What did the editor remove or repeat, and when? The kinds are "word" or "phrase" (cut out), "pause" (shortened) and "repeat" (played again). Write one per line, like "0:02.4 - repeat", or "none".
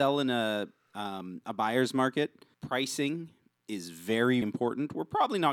0:02.5 - pause
0:04.4 - word